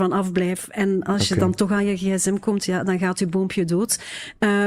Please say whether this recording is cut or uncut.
uncut